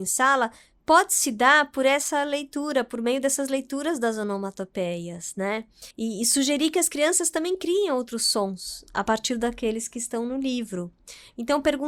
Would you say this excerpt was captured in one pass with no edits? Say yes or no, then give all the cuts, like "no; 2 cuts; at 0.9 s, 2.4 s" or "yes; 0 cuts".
no; 1 cut; at 5.9 s